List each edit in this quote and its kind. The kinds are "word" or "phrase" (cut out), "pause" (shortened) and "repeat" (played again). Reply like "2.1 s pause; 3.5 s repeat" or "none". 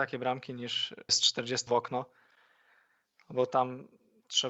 1.1 s word; 1.7 s word